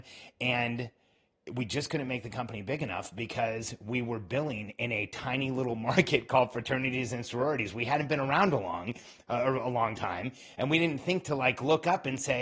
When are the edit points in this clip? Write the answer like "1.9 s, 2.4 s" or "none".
none